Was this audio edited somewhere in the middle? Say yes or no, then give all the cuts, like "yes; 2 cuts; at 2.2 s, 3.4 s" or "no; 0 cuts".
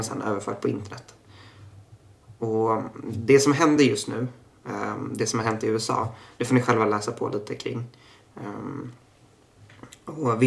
no; 0 cuts